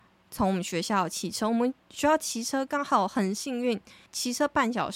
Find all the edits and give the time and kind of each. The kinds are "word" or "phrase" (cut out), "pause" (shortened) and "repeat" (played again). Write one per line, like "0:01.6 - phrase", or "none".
0:01.8 - pause
0:04.1 - pause

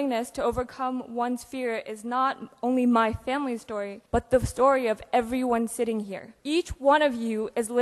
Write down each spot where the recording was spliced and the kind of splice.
0:04.1 - pause
0:06.4 - pause

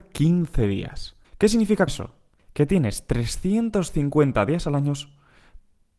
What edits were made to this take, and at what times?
0:01.2 - pause
0:01.9 - word
0:02.4 - pause

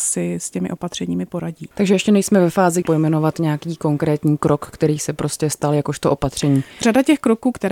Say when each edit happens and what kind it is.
0:02.8 - phrase

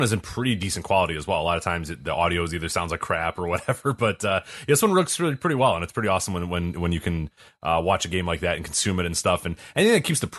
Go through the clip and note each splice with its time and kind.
none

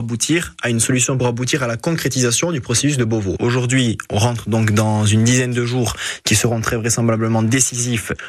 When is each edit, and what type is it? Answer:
0:01.2 - phrase

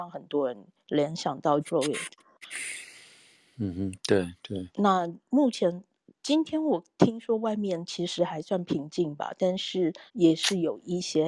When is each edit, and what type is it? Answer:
0:01.6 - word
0:10.1 - pause

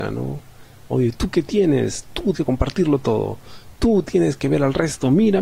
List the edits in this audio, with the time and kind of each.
0:02.3 - word

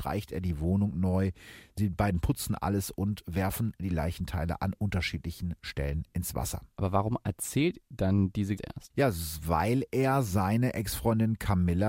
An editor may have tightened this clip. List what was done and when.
0:06.7 - pause
0:07.8 - word
0:08.6 - phrase

